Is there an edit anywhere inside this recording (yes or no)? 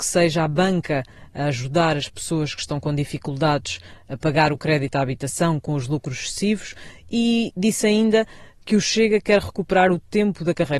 no